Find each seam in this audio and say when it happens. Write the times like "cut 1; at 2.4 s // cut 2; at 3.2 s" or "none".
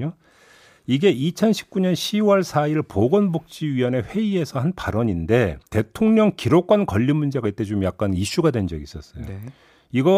cut 1; at 5.7 s